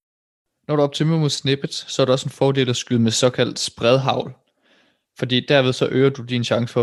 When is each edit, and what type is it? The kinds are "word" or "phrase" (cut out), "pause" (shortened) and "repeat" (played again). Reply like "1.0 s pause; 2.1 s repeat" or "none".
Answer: none